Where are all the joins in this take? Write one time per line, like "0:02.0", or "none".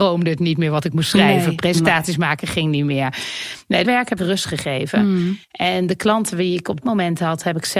0:03.8
0:04.2
0:05.4
0:06.8